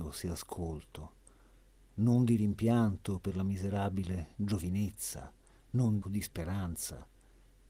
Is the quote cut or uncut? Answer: cut